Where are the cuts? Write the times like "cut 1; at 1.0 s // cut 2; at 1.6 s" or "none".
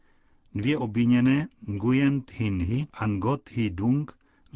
cut 1; at 2.9 s